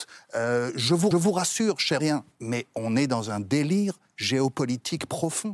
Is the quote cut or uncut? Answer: cut